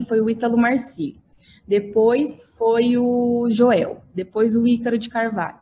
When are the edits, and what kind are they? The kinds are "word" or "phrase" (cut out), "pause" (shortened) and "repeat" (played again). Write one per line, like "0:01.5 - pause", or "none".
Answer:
none